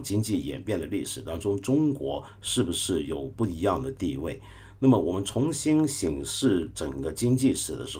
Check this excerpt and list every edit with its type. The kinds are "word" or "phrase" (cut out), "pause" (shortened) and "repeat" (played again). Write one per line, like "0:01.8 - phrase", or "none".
none